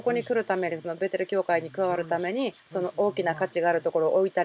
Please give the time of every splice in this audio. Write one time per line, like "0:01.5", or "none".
0:02.6